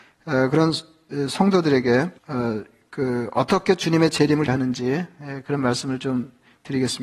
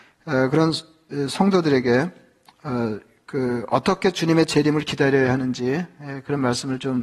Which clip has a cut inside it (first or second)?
first